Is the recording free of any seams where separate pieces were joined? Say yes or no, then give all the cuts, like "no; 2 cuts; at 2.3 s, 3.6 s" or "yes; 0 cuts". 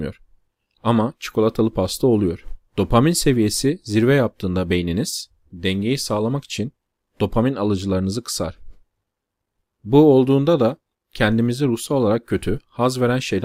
no; 1 cut; at 2.7 s